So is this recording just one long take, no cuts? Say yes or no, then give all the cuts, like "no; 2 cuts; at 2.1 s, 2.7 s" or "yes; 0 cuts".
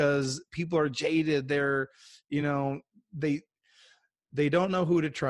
yes; 0 cuts